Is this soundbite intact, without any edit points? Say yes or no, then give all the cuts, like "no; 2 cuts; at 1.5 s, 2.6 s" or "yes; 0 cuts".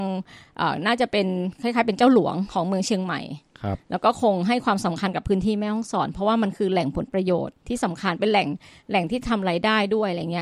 no; 1 cut; at 7.6 s